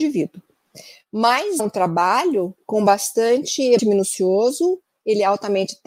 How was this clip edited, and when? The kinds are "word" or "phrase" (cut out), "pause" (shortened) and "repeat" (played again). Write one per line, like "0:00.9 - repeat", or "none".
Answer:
0:01.6 - word
0:03.8 - word